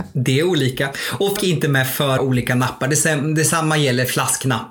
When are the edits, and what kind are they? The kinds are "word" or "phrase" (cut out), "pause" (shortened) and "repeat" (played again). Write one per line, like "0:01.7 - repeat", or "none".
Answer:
0:01.4 - word
0:02.2 - word